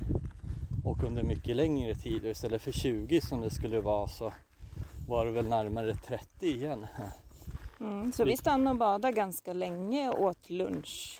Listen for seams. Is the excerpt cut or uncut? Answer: uncut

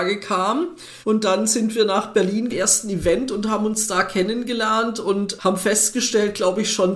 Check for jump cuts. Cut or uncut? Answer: cut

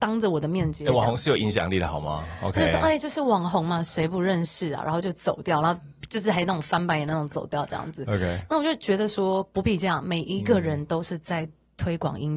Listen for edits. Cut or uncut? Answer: uncut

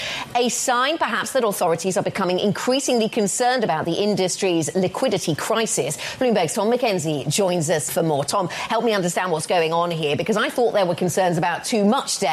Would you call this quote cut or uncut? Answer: cut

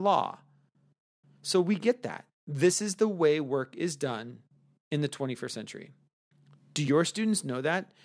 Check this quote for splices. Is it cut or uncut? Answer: uncut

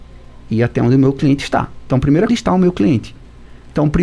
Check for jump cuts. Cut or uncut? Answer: cut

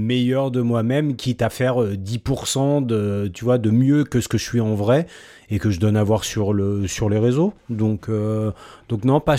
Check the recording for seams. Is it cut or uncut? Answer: uncut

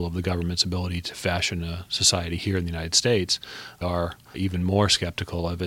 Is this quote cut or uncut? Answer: cut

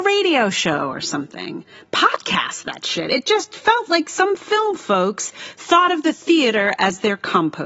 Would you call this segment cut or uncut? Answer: uncut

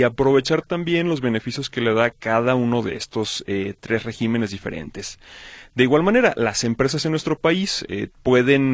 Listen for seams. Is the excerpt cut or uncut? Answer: uncut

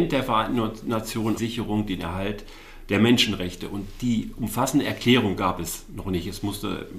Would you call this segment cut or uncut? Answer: cut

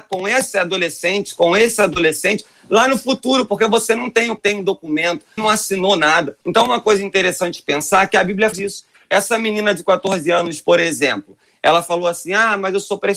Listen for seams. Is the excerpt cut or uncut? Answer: cut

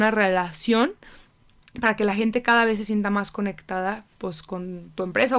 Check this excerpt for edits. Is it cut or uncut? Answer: uncut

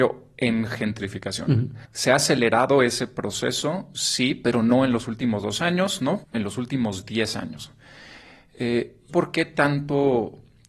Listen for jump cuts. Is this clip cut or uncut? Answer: cut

